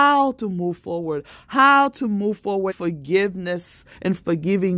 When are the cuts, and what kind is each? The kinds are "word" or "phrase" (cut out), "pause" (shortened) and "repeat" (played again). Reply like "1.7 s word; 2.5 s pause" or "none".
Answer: 2.7 s word